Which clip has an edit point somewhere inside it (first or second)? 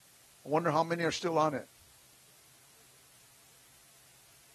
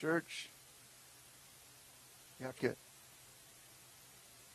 second